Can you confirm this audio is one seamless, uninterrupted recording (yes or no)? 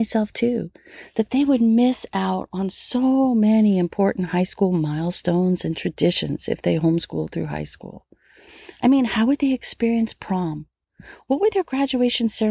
yes